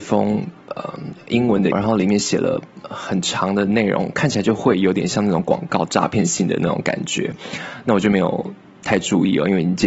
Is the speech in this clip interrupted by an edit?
yes; 1 cut; at 1.7 s

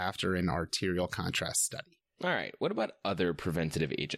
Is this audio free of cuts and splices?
yes; 0 cuts

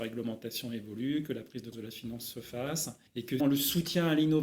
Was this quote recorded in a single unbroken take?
no; 3 cuts; at 1.7 s, 3.1 s, 3.4 s

